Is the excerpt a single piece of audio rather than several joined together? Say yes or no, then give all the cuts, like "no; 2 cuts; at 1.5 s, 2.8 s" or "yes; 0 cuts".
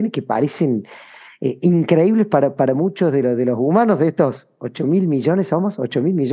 yes; 0 cuts